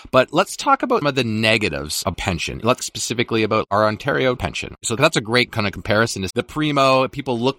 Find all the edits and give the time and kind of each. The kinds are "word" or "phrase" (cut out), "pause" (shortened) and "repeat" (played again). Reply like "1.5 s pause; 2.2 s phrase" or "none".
1.0 s word; 2.1 s word; 2.8 s word; 4.4 s word; 5.5 s word; 6.3 s word